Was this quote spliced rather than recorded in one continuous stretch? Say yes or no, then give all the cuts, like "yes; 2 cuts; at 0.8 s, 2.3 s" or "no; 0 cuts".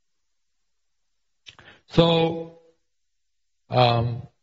no; 0 cuts